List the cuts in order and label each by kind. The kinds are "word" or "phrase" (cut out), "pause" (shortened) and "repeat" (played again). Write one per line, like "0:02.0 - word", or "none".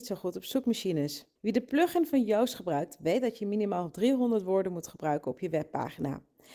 0:01.4 - pause